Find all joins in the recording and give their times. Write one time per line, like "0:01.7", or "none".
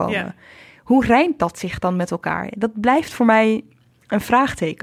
none